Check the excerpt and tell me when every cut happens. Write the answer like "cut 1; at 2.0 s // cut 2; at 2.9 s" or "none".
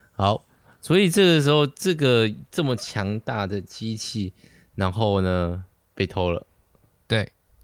cut 1; at 5.7 s